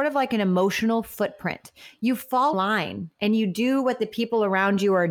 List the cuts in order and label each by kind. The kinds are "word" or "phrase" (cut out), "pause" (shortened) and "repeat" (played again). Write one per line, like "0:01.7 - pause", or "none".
0:02.5 - word

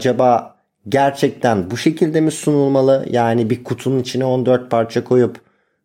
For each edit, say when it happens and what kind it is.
none

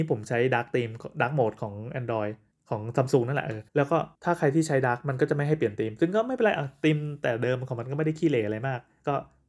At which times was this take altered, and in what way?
0:02.5 - pause
0:03.7 - pause
0:04.1 - pause

